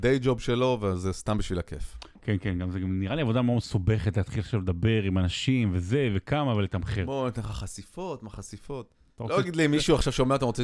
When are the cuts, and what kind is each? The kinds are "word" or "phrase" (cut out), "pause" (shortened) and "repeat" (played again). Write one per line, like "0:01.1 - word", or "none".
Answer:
0:09.1 - pause